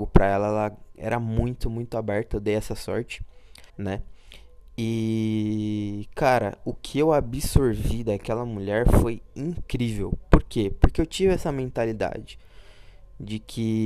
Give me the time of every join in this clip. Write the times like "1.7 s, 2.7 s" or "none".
3.7 s

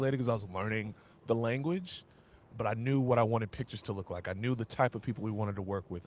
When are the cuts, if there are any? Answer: none

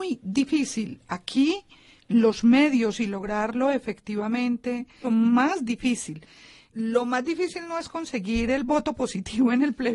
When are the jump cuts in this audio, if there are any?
5.0 s

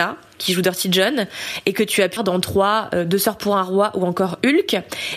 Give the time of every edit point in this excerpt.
2.2 s

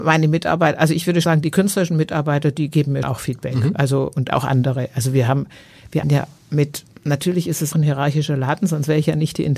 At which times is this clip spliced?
1.2 s, 3.0 s, 6.0 s, 6.9 s, 7.7 s

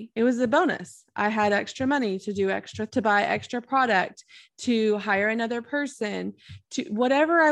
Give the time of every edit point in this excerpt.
2.9 s

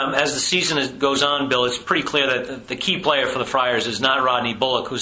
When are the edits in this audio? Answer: none

